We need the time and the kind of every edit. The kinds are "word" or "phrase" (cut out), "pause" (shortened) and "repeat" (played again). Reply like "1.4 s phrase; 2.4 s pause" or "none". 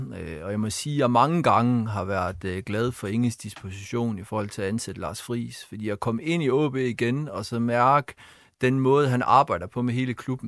none